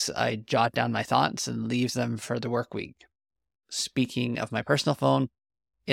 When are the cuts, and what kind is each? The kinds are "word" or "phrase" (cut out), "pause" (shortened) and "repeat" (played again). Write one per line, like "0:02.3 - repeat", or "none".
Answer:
none